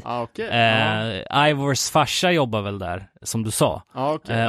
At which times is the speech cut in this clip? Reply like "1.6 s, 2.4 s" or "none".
none